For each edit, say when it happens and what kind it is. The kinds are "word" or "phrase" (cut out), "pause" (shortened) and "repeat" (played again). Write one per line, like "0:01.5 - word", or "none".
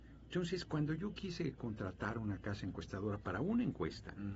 none